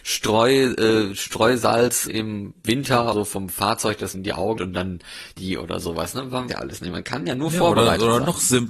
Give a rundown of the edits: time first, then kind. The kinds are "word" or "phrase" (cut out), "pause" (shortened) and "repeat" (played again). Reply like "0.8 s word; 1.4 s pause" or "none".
2.1 s word; 3.1 s word; 4.1 s word; 4.6 s word; 5.4 s word; 6.5 s word